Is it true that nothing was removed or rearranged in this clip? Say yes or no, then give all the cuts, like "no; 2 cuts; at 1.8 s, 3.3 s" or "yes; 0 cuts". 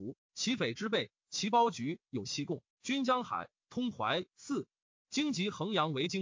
no; 1 cut; at 2.7 s